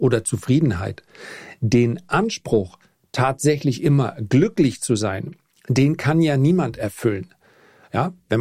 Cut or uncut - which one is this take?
uncut